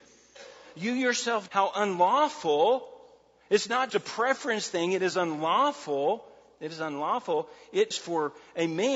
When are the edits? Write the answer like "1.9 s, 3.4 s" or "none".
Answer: 1.5 s, 3.9 s, 7.9 s